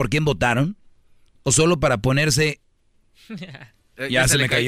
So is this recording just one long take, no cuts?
yes; 0 cuts

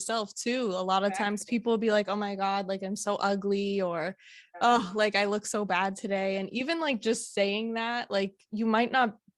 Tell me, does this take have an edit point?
no; 0 cuts

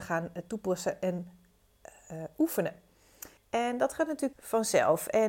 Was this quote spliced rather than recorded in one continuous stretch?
yes; 2 cuts; at 3.4 s, 4.3 s

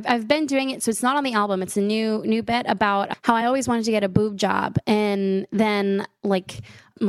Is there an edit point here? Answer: no; 0 cuts

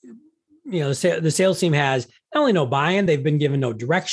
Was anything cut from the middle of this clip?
no; 0 cuts

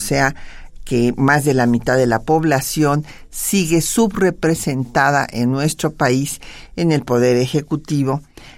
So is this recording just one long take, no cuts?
yes; 0 cuts

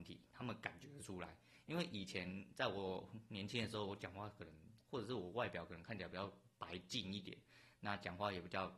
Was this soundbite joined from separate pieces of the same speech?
yes; 2 cuts; at 4.8 s, 6.5 s

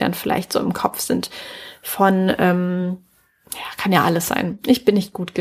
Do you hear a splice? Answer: no; 0 cuts

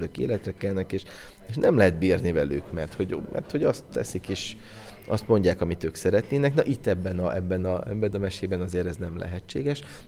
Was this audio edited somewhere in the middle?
no; 0 cuts

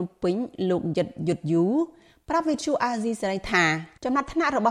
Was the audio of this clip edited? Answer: no; 0 cuts

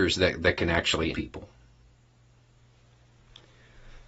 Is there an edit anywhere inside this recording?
yes; 1 cut; at 1.1 s

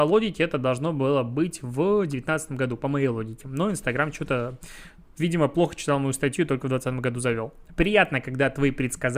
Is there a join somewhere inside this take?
no; 0 cuts

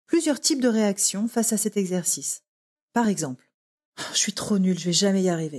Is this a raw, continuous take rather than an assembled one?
yes; 0 cuts

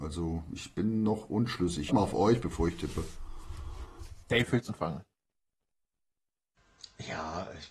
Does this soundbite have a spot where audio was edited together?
yes; 3 cuts; at 1.9 s, 4.2 s, 4.7 s

